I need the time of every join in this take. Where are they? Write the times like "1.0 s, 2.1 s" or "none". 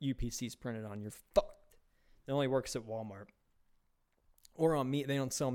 none